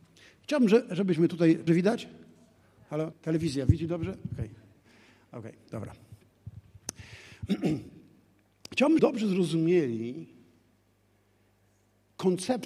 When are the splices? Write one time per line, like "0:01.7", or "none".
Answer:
0:01.7
0:03.1
0:09.0